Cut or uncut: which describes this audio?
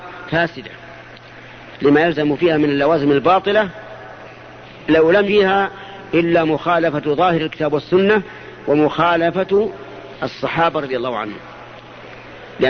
cut